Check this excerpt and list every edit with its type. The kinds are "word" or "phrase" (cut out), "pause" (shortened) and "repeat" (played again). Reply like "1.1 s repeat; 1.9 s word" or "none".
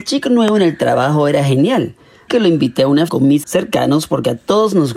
2.3 s word; 3.1 s word; 3.4 s word